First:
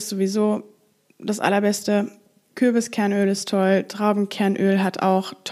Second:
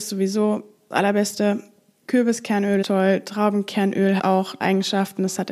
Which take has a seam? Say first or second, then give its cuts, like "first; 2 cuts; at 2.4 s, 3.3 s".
second; 4 cuts; at 0.9 s, 2.8 s, 4.2 s, 4.6 s